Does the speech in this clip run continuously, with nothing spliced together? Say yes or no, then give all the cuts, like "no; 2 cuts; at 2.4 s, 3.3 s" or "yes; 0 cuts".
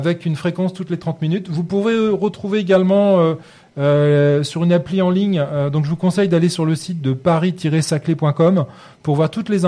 yes; 0 cuts